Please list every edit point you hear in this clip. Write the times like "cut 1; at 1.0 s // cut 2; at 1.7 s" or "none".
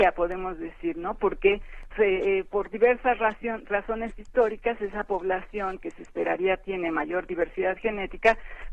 cut 1; at 1.9 s